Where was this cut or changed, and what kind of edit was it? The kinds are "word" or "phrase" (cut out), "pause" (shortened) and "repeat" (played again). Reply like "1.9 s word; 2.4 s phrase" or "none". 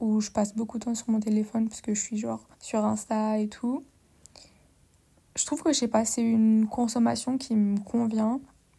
2.5 s pause